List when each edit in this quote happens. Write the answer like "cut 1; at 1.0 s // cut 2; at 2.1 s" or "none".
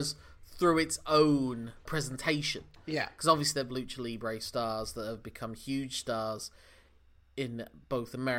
cut 1; at 3.7 s